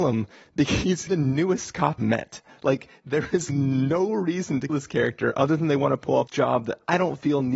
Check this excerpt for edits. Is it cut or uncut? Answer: cut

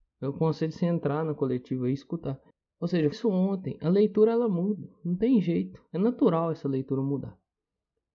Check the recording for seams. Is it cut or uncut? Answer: cut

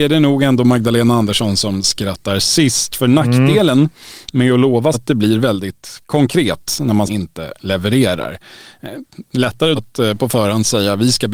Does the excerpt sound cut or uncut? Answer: cut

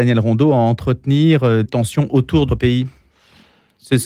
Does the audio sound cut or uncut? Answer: cut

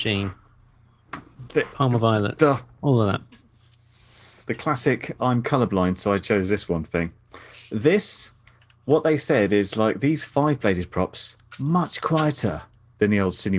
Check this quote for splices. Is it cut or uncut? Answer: cut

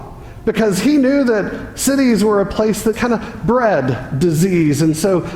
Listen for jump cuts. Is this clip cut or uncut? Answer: cut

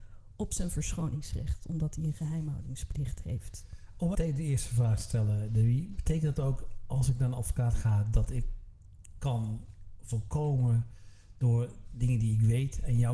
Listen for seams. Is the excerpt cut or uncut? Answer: cut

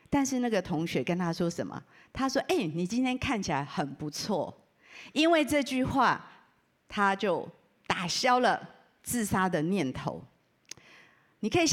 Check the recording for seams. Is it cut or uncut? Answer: uncut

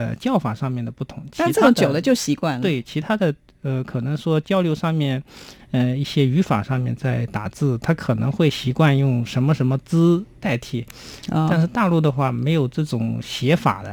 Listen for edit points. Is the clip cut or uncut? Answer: uncut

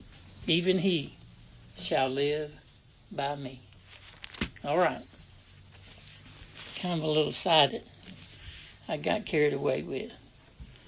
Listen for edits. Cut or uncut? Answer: cut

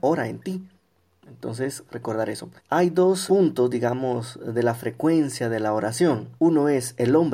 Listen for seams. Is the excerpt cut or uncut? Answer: cut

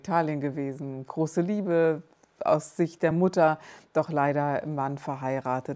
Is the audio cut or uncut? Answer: uncut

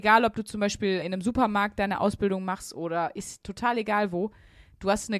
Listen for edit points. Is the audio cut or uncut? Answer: cut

